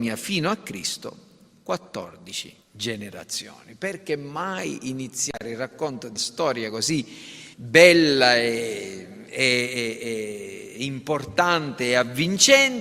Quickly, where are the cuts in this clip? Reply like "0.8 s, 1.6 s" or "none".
2.6 s, 6.2 s, 7.5 s